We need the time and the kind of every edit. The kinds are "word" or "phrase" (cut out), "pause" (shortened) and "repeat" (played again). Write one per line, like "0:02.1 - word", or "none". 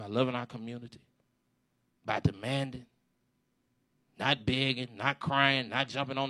none